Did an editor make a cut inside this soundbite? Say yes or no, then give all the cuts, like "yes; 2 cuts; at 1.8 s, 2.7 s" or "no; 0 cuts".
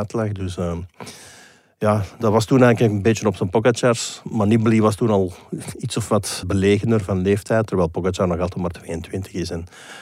yes; 1 cut; at 6.4 s